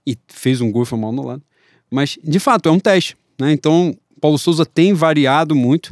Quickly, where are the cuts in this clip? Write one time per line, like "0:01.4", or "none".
none